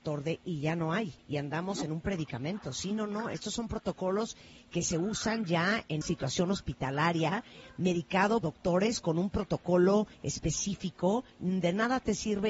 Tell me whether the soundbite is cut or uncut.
cut